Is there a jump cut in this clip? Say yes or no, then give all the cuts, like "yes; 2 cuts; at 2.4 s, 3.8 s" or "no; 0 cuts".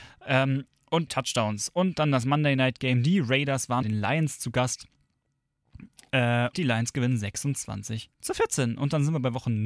yes; 4 cuts; at 1.1 s, 3.8 s, 6.5 s, 8.1 s